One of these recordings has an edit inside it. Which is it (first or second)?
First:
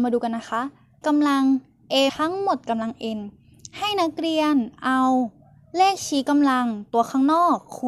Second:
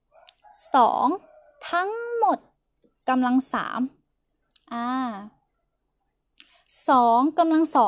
first